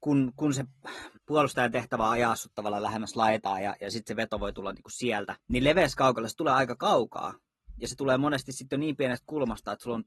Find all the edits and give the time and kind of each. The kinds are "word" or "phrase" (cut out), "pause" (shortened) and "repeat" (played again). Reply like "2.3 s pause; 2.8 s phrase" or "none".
1.2 s pause; 5.4 s pause